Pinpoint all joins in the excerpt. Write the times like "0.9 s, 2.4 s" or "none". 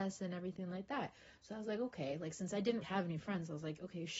2.8 s